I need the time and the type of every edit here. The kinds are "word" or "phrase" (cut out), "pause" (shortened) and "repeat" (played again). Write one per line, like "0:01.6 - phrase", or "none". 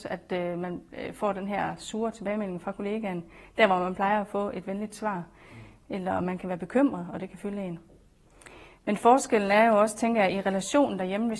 none